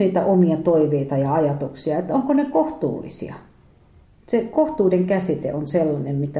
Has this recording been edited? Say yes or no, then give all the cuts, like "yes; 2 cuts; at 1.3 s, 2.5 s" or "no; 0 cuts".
yes; 1 cut; at 4.0 s